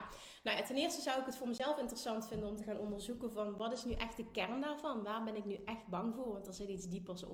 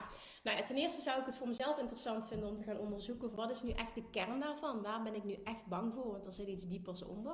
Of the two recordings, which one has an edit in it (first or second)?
second